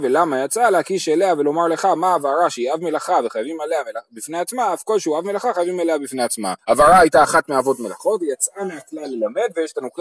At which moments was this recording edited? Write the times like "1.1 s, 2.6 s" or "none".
6.6 s

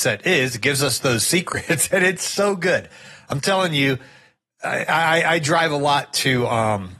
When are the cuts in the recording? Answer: none

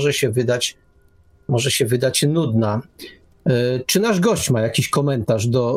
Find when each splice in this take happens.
none

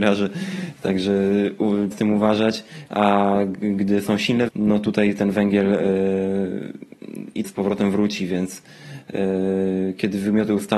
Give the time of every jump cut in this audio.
1.9 s, 4.5 s, 7.4 s

